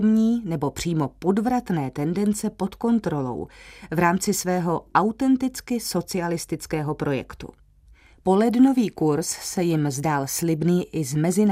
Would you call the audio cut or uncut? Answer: uncut